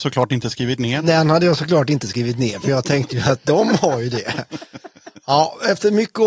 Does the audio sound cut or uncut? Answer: uncut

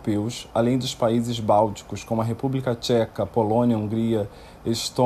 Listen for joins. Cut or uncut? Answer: uncut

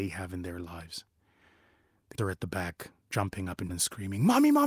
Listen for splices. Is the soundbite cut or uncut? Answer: cut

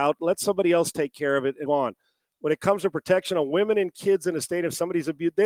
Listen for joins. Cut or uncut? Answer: cut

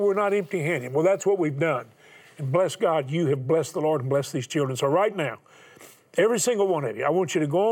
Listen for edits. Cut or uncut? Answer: uncut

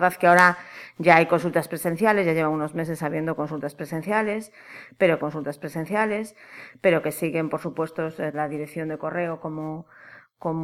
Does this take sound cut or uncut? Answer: cut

